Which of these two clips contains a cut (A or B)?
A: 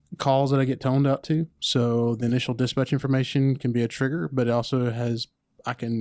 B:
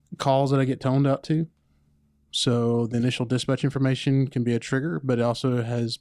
A